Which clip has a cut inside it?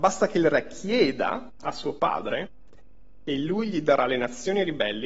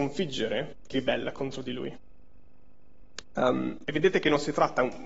second; 1 cut; at 0.9 s

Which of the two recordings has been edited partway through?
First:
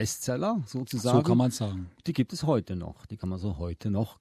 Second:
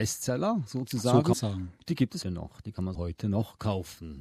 second; 3 cuts; at 1.3 s, 2.2 s, 2.9 s

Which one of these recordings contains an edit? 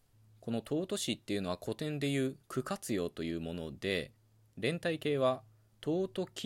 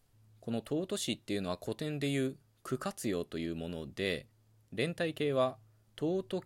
first; 1 cut; at 2.4 s

